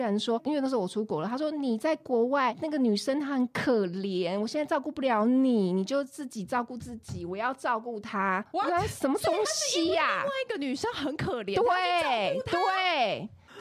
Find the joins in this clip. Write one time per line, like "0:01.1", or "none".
none